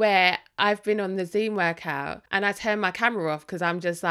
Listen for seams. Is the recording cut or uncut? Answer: cut